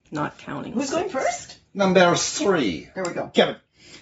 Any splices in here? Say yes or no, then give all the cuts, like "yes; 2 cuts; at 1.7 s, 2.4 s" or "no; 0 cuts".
no; 0 cuts